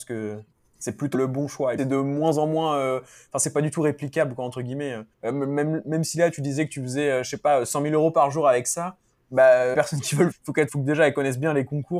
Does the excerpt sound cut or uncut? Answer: cut